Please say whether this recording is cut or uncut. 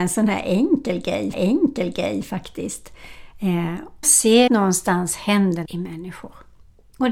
cut